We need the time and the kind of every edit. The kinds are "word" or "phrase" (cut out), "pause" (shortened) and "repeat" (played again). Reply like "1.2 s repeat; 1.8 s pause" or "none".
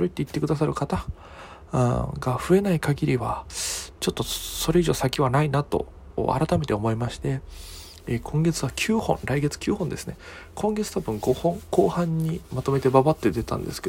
none